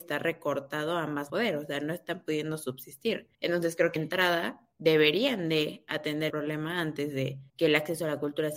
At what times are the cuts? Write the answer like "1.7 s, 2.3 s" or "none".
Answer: 1.3 s, 3.3 s, 4.0 s, 4.7 s, 6.3 s, 7.5 s